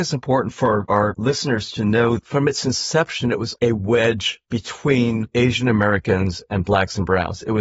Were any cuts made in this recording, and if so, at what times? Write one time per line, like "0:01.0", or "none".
0:03.6